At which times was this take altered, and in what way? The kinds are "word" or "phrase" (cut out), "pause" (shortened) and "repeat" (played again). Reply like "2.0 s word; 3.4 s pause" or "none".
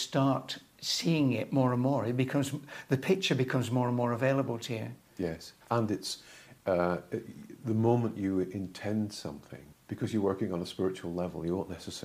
5.6 s pause; 9.7 s pause